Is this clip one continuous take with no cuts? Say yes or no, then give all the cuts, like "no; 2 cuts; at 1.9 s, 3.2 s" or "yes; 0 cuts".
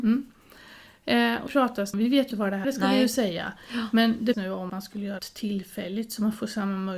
no; 7 cuts; at 1.5 s, 1.9 s, 2.3 s, 2.6 s, 4.3 s, 4.7 s, 5.2 s